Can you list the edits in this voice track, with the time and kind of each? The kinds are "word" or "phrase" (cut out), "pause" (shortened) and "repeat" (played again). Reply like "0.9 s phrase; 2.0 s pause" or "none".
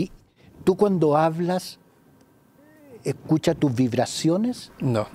none